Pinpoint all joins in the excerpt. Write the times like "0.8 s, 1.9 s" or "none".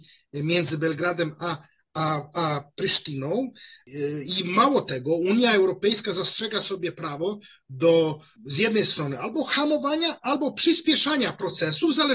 none